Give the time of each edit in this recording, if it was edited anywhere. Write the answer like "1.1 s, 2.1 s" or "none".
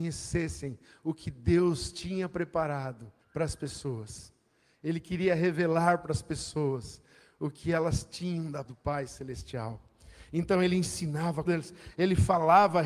3.2 s, 8.6 s, 11.5 s